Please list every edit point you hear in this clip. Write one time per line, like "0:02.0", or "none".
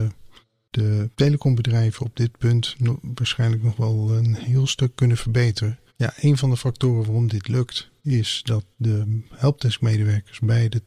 0:01.1
0:05.9
0:08.0
0:08.7